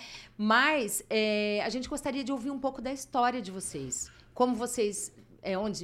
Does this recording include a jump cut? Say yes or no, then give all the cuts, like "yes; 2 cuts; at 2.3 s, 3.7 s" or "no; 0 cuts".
no; 0 cuts